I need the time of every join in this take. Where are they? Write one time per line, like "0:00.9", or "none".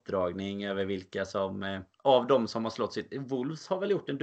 0:01.9